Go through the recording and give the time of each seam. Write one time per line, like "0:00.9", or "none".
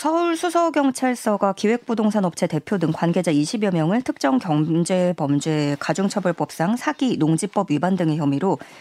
none